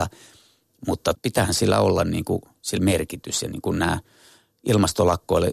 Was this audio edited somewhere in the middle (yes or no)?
yes